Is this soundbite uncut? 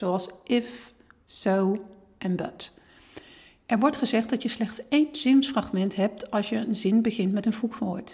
yes; 0 cuts

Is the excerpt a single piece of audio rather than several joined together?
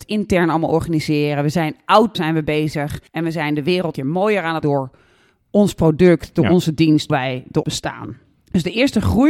no; 7 cuts; at 2.1 s, 3.1 s, 4.0 s, 4.6 s, 7.1 s, 7.6 s, 8.4 s

